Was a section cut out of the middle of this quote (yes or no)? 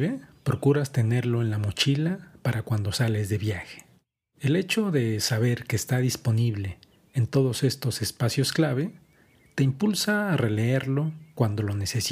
no